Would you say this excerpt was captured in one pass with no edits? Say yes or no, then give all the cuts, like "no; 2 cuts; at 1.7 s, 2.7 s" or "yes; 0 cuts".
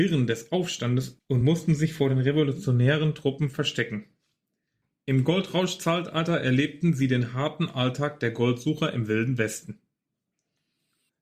yes; 0 cuts